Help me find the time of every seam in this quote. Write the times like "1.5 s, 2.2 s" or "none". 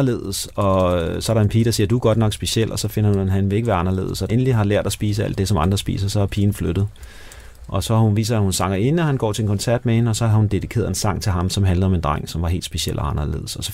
4.3 s